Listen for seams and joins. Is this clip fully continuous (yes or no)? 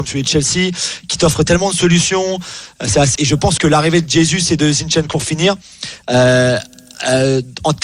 no